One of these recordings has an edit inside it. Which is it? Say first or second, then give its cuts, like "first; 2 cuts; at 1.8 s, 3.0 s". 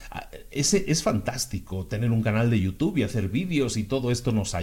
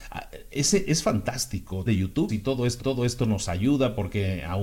second; 3 cuts; at 1.9 s, 2.3 s, 2.8 s